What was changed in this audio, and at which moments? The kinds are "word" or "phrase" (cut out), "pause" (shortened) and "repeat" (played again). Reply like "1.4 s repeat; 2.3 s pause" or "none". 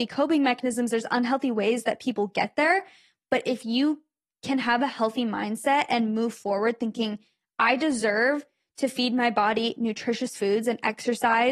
none